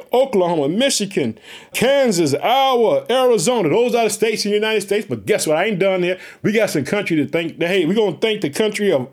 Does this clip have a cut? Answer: yes; 1 cut; at 1.7 s

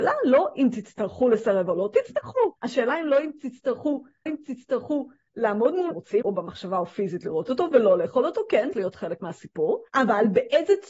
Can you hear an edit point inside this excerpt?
yes; 6 cuts; at 2.6 s, 4.3 s, 5.9 s, 6.2 s, 8.7 s, 9.9 s

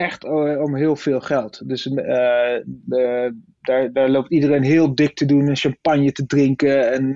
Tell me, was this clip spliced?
no; 0 cuts

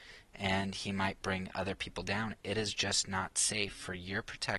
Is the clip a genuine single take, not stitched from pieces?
yes; 0 cuts

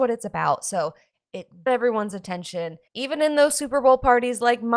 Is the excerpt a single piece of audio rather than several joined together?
no; 2 cuts; at 1.7 s, 2.9 s

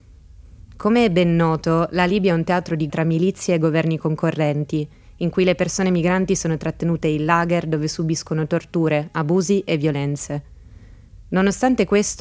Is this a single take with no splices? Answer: no; 1 cut; at 2.9 s

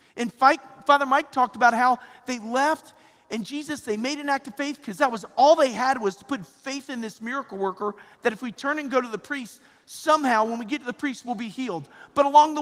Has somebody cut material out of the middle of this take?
no; 0 cuts

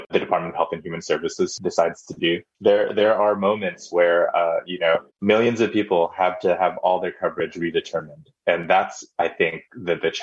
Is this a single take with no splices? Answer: no; 1 cut; at 5.1 s

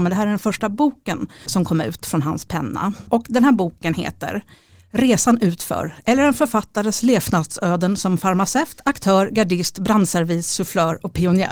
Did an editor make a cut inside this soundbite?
no; 0 cuts

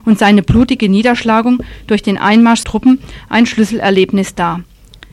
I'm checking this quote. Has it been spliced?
yes; 1 cut; at 2.6 s

